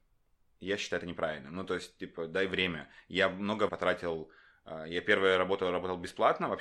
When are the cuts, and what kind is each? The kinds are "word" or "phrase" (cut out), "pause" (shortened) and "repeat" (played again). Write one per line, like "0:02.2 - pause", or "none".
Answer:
0:03.7 - word